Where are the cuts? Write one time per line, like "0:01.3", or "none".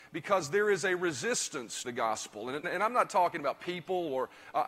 0:01.8
0:02.6